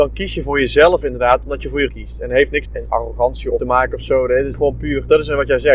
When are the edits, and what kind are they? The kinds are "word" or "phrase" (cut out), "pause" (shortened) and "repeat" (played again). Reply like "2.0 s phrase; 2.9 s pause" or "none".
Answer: 1.9 s word; 2.7 s word; 3.6 s phrase; 4.5 s word

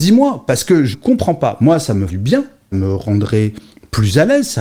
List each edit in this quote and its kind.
0.9 s word; 2.1 s word; 2.7 s word

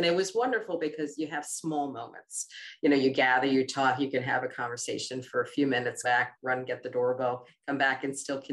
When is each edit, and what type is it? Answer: 6.0 s word

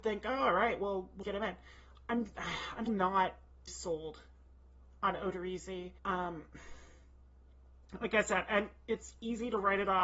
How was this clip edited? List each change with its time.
1.2 s word; 2.9 s word; 3.7 s word; 6.0 s pause

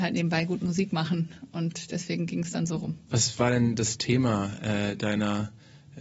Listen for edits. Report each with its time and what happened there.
none

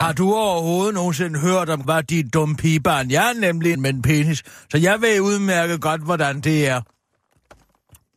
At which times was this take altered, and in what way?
1.8 s word; 3.7 s phrase

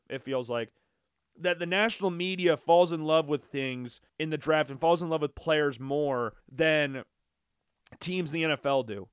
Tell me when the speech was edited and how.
4.1 s pause; 6.4 s pause

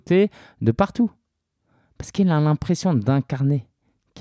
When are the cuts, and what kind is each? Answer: none

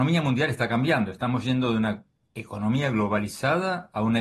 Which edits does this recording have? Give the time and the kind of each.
none

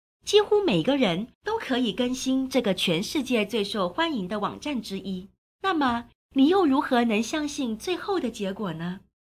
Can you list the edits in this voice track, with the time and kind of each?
1.3 s pause; 5.5 s pause

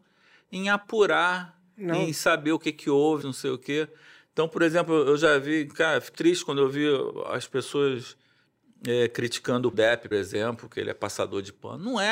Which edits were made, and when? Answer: 3.2 s word; 6.1 s word; 9.7 s word; 10.1 s word

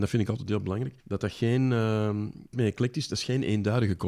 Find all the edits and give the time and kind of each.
1.0 s pause; 2.5 s phrase

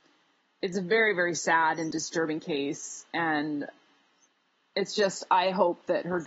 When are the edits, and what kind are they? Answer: none

